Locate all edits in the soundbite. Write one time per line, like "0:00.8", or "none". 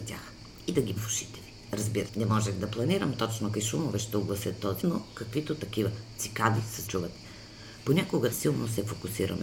0:01.0
0:02.1
0:03.5
0:04.8
0:06.9
0:08.3